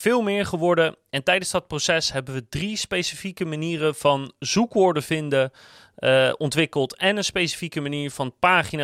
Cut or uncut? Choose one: uncut